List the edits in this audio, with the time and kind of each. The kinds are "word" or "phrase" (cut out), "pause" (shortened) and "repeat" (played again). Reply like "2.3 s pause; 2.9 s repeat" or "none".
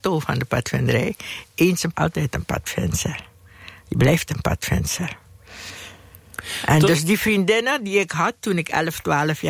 1.9 s word; 4.3 s word